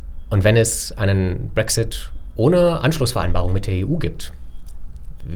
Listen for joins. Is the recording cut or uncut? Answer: uncut